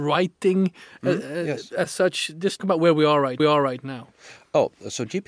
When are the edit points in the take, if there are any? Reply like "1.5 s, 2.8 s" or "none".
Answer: 2.6 s, 3.4 s

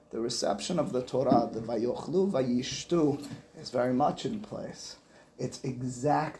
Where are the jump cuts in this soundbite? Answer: none

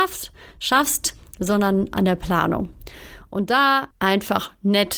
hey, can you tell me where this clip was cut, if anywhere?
3.9 s

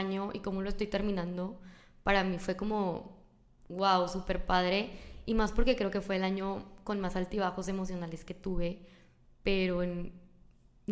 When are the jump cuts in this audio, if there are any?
none

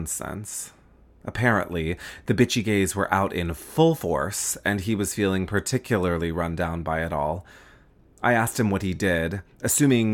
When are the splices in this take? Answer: none

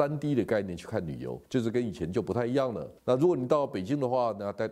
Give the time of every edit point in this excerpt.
1.4 s, 3.0 s

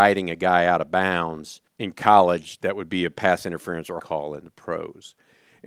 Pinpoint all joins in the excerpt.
1.7 s, 4.0 s

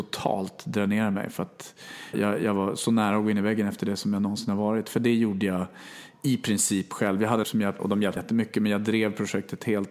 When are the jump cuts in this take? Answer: 2.1 s, 7.4 s, 7.8 s, 8.2 s

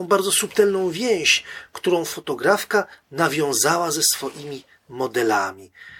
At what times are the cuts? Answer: none

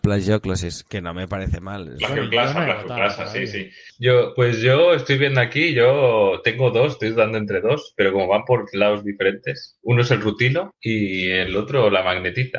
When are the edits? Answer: none

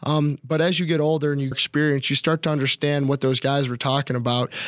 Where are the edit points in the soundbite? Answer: 1.5 s

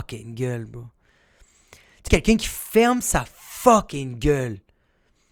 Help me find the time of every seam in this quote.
2.1 s

